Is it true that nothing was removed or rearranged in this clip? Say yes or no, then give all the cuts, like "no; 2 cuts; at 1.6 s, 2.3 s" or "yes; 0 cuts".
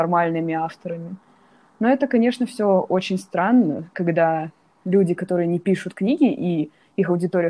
yes; 0 cuts